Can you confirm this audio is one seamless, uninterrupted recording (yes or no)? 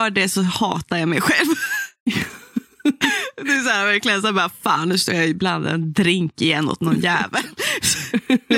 yes